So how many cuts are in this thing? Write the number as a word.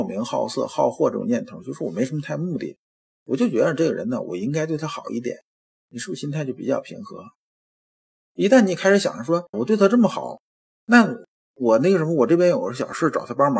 one